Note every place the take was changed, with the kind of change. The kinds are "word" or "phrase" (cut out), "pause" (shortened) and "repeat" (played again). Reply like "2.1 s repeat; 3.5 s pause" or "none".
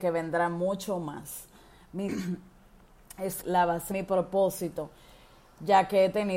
2.1 s word; 3.4 s word; 3.9 s word